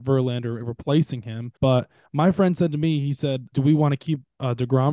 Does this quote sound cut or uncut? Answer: cut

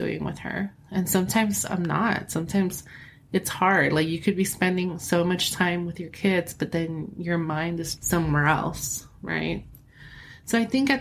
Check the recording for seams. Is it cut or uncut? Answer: cut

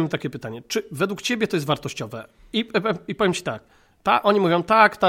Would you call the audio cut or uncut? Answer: uncut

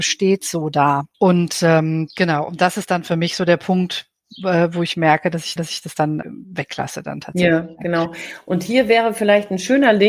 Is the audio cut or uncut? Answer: cut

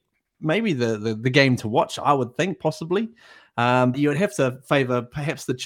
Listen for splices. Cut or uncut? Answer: cut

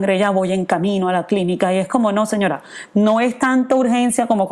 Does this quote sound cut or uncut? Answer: uncut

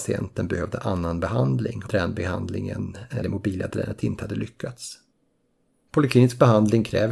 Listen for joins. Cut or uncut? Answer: cut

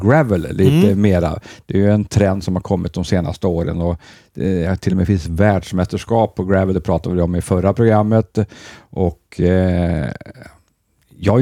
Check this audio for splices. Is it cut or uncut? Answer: uncut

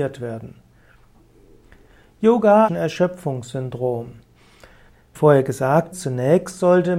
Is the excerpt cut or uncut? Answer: cut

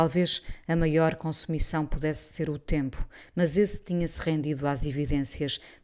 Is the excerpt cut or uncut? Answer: uncut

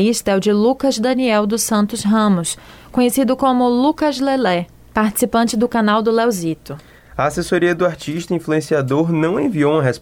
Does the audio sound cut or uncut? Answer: uncut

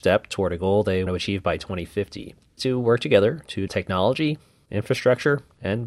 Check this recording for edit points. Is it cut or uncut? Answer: cut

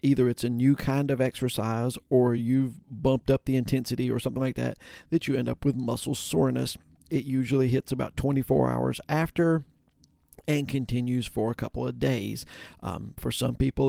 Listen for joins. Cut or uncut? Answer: uncut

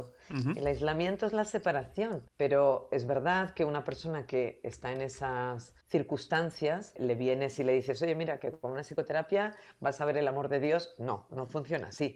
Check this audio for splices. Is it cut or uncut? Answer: cut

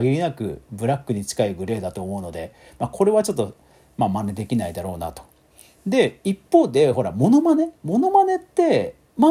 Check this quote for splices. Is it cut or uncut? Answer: cut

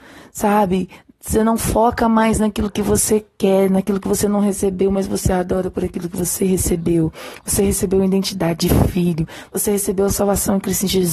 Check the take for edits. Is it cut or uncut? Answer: uncut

